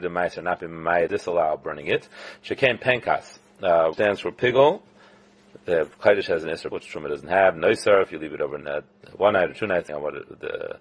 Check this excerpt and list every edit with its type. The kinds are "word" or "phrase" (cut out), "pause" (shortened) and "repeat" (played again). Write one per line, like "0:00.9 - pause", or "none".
0:01.1 - word
0:03.9 - word
0:06.7 - word
0:09.9 - word